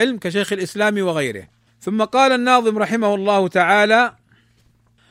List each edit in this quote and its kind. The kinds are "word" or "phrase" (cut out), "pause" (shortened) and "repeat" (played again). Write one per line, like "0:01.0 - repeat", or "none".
0:01.7 - pause